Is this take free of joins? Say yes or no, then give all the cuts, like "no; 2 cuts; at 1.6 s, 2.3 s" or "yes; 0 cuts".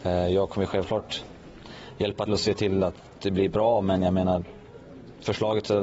no; 1 cut; at 2.3 s